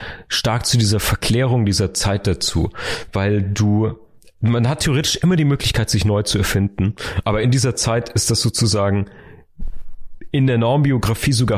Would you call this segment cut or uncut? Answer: uncut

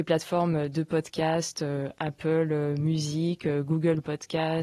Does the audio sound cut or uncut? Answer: uncut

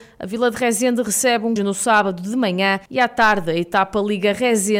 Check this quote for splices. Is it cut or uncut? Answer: cut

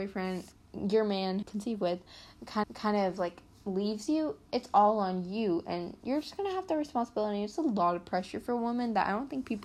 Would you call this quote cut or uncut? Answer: cut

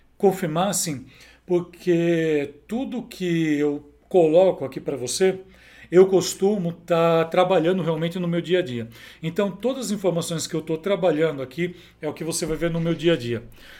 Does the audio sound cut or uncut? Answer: uncut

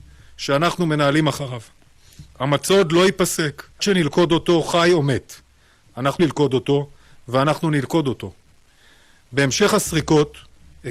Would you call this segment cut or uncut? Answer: cut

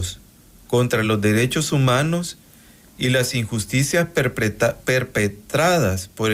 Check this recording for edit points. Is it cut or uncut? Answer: uncut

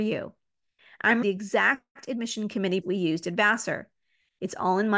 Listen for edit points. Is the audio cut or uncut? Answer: cut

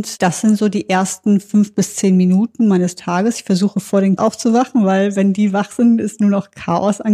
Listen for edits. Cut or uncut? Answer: cut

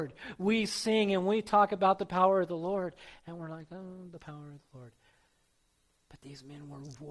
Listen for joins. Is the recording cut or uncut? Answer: uncut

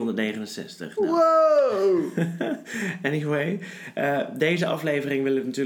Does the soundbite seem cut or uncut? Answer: uncut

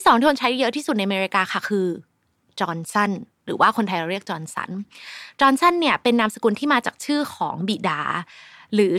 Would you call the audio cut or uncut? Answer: uncut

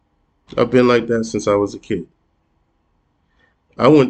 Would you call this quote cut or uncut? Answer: uncut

